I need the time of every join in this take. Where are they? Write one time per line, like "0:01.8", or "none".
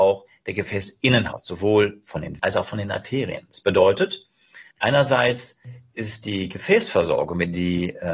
0:02.4
0:04.7